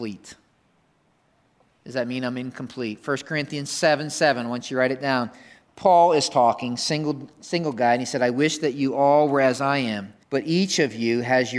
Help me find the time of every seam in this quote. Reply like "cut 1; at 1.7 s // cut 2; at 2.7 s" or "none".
cut 1; at 10.2 s